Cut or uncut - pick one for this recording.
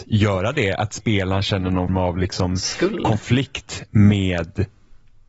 cut